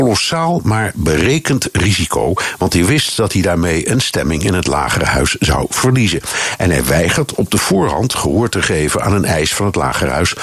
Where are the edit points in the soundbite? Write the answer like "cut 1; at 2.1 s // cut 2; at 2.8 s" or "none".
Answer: none